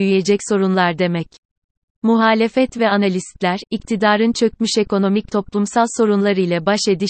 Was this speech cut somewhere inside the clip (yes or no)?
yes